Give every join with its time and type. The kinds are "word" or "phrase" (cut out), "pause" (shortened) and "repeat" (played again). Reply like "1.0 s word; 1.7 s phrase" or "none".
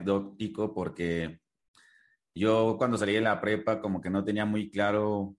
2.4 s word

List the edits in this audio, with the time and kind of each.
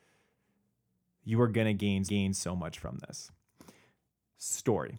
2.0 s repeat

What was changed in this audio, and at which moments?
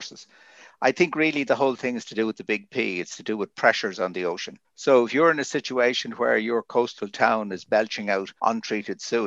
4.6 s pause; 8.4 s pause

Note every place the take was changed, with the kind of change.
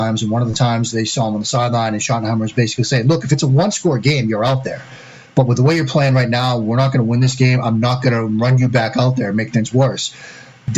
none

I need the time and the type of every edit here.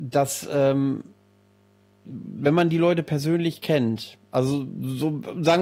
none

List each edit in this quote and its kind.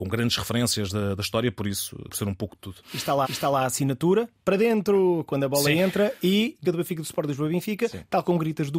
2.1 s word; 2.8 s pause; 3.2 s repeat; 6.6 s word

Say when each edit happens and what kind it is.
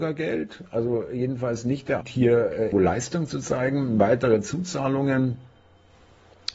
2.0 s phrase; 2.7 s word

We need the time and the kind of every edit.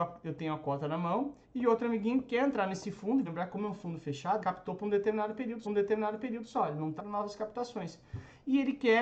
1.4 s pause; 3.3 s word; 4.4 s word; 5.6 s repeat; 7.0 s phrase

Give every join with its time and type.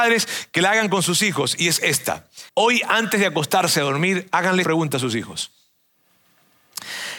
2.5 s pause; 4.6 s word

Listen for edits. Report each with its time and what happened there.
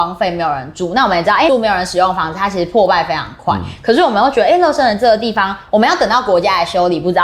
1.5 s phrase

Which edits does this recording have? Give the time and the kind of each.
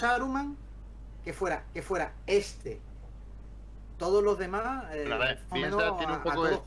1.7 s repeat; 5.5 s phrase

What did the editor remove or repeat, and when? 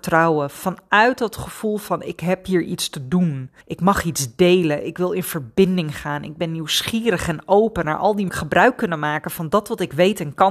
3.6 s pause; 8.3 s phrase

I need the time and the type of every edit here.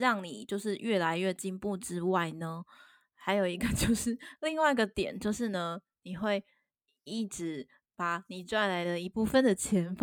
none

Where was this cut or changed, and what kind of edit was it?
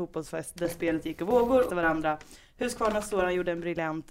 1.7 s phrase

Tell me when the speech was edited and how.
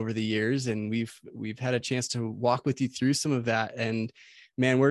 none

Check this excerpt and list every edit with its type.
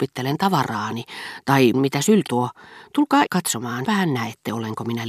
1.7 s word; 2.3 s word; 3.3 s word; 3.8 s word

